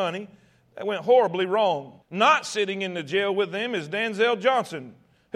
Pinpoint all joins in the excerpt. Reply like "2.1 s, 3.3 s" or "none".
2.0 s